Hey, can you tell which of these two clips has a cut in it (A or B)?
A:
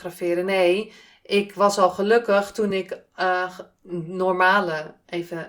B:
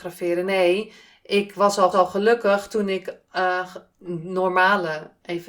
B